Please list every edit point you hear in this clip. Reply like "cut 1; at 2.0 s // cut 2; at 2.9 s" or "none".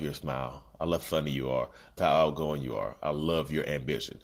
cut 1; at 1.0 s // cut 2; at 2.0 s